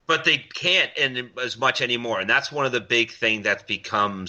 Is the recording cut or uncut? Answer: uncut